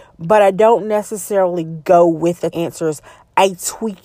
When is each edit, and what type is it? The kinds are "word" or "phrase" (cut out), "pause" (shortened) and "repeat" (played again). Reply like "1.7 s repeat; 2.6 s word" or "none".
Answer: 2.5 s word